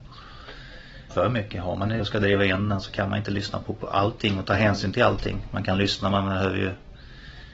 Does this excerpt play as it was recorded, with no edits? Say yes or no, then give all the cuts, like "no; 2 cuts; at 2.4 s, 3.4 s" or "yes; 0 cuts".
no; 2 cuts; at 1.1 s, 2.0 s